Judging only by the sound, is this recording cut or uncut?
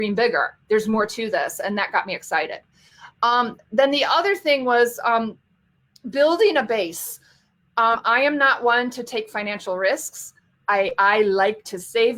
uncut